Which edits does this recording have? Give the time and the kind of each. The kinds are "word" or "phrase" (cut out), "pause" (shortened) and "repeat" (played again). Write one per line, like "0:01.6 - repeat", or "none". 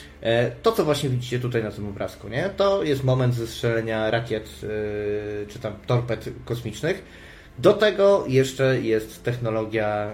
none